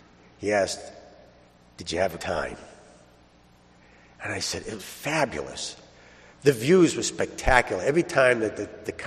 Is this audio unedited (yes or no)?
no